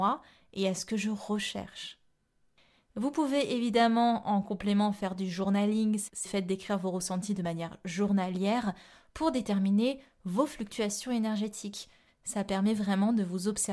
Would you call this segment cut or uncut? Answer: cut